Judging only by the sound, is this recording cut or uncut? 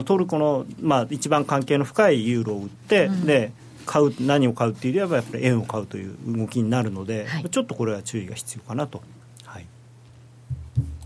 uncut